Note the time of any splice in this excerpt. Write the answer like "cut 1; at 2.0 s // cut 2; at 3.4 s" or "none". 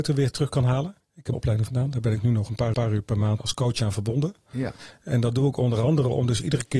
cut 1; at 1.0 s // cut 2; at 1.3 s // cut 3; at 1.7 s // cut 4; at 2.7 s // cut 5; at 3.4 s